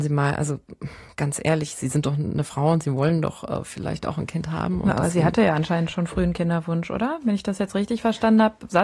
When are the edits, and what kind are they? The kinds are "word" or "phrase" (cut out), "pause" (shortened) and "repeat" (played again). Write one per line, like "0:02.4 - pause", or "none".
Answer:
none